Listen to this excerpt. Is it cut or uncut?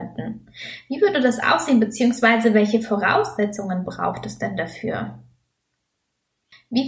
uncut